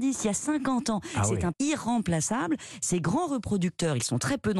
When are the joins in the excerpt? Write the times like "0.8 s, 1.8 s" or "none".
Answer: 1.5 s

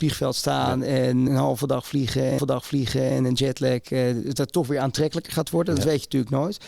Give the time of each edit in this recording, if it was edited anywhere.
1.3 s, 2.4 s

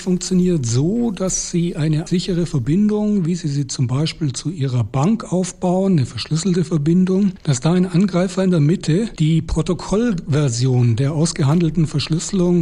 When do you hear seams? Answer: 2.1 s

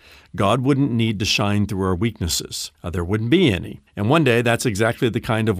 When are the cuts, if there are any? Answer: 2.7 s, 3.9 s

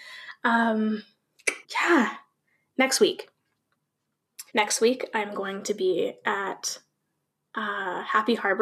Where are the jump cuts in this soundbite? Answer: 1.6 s, 4.5 s

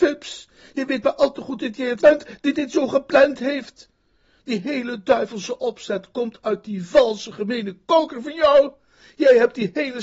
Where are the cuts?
2.0 s

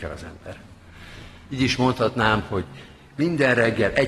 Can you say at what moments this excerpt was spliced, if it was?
none

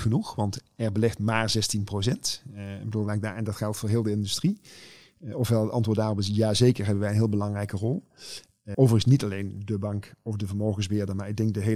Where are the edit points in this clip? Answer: 8.7 s

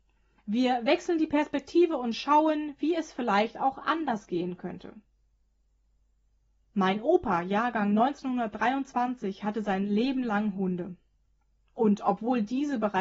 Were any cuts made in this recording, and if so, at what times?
none

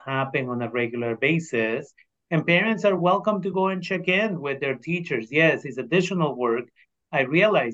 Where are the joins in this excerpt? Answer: none

